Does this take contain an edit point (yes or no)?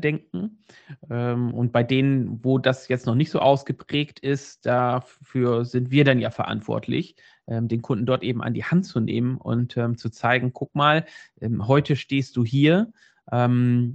no